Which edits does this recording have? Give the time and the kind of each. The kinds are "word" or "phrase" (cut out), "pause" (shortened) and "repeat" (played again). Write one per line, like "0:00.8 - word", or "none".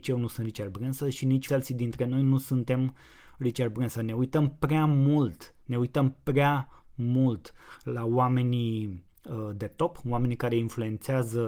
0:01.5 - word